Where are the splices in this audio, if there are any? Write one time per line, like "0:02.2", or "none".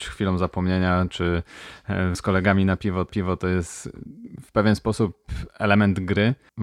0:02.1
0:03.1